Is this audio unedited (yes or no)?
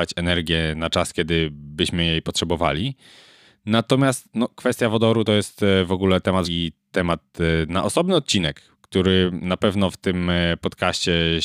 no